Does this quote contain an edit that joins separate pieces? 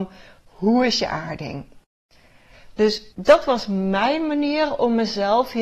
yes; 1 cut; at 3.1 s

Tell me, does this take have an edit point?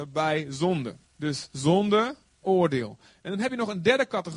yes; 2 cuts; at 1.0 s, 2.4 s

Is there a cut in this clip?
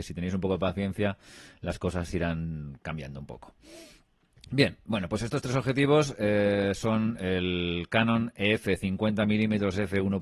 no; 0 cuts

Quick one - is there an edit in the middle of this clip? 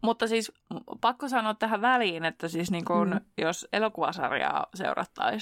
no; 0 cuts

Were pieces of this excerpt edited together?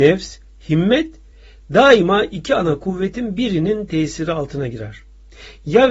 no; 0 cuts

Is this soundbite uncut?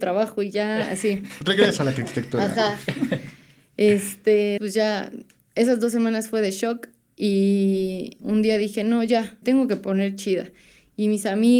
no; 3 cuts; at 4.6 s, 8.2 s, 9.4 s

